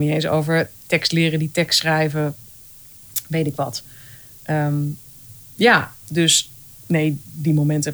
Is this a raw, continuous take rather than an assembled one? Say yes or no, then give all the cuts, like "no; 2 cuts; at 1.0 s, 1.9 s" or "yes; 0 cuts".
yes; 0 cuts